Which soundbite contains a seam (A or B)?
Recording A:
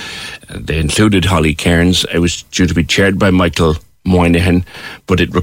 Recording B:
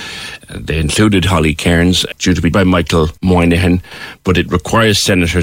B